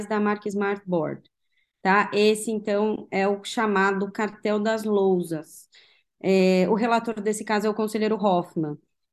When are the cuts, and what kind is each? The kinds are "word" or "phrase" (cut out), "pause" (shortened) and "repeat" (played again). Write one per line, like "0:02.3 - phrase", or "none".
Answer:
none